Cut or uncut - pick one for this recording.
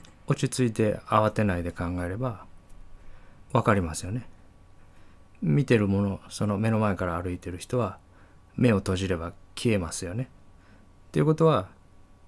uncut